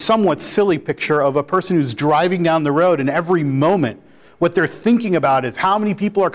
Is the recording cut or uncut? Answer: uncut